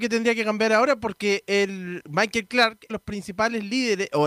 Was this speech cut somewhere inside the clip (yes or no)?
yes